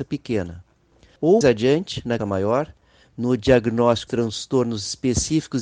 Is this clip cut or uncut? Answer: cut